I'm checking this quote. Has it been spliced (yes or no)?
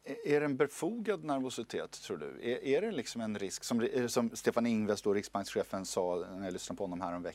no